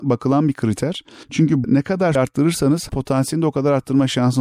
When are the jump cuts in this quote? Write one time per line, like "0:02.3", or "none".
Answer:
0:01.6
0:02.1
0:02.9